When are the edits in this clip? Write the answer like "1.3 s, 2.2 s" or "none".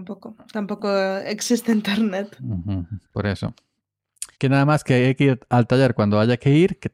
4.3 s